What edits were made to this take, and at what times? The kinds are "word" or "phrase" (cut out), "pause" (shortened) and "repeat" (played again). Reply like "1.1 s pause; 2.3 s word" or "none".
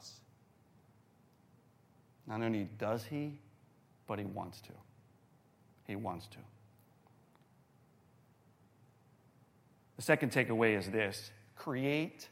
none